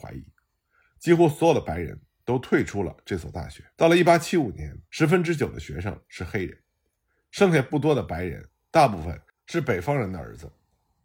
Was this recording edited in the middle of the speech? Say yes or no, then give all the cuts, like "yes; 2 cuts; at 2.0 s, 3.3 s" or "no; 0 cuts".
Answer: yes; 2 cuts; at 3.7 s, 4.8 s